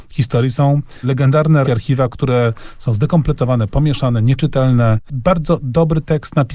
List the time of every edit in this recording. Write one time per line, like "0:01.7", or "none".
0:01.0
0:01.6
0:03.7